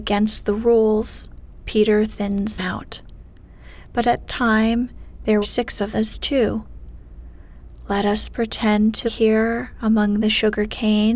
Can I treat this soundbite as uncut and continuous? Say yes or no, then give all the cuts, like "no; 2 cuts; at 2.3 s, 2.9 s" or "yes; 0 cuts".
no; 5 cuts; at 2.6 s, 4.3 s, 5.4 s, 5.9 s, 9.1 s